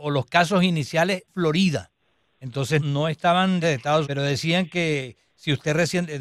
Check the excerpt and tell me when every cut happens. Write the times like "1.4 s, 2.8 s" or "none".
1.3 s, 2.8 s, 3.6 s, 4.0 s

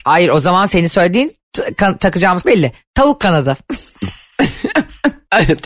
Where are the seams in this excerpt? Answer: 2.4 s

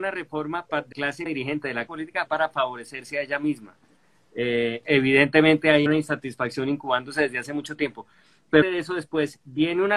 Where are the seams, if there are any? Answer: 0.9 s, 1.3 s, 1.9 s, 2.3 s, 4.8 s, 5.9 s, 8.6 s

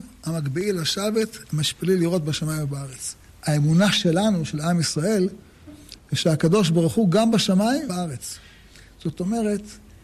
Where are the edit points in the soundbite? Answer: 3.3 s, 7.9 s

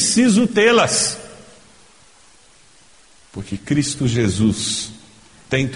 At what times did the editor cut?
none

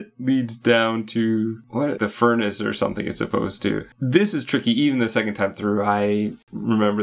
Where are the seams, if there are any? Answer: 2.0 s

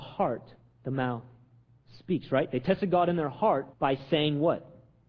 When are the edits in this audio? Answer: 3.7 s

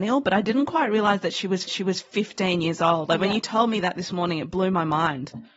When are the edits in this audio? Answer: 1.7 s

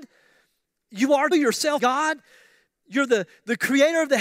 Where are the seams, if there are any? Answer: 1.3 s, 1.8 s

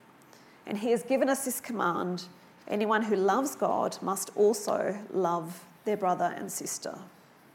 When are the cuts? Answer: none

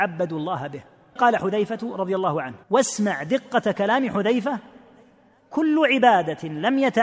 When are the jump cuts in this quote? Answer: 1.2 s, 2.6 s

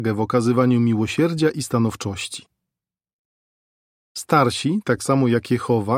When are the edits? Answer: none

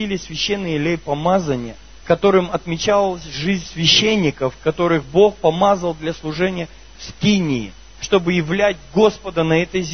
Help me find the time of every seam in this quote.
2.0 s

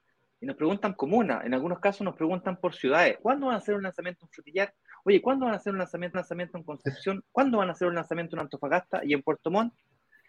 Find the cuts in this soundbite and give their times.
1.0 s, 3.2 s, 6.1 s

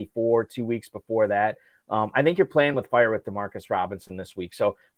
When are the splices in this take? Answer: none

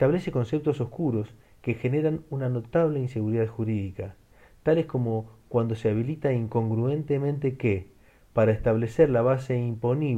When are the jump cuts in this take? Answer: none

